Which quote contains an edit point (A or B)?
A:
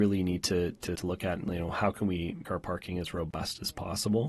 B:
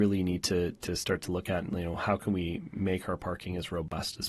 A